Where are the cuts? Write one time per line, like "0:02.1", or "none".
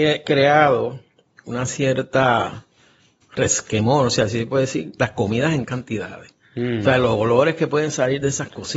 0:03.2
0:05.6